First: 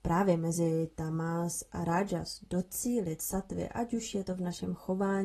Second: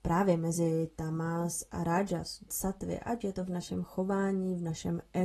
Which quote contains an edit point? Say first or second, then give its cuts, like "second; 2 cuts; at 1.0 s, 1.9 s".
second; 2 cuts; at 2.5 s, 3.2 s